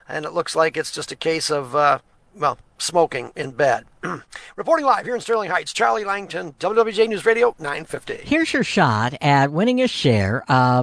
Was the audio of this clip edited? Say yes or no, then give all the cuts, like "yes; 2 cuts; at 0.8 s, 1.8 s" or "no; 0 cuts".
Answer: no; 0 cuts